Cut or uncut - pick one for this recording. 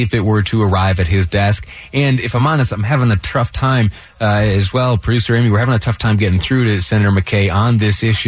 uncut